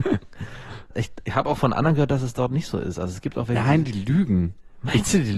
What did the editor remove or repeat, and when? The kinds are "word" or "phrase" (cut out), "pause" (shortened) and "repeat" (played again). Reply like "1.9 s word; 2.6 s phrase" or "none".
none